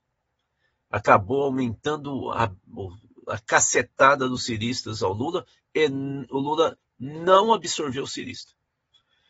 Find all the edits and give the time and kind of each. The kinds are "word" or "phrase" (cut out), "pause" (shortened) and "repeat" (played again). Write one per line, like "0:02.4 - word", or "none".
none